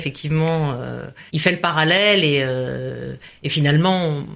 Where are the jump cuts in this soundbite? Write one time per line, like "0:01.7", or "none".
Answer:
0:01.3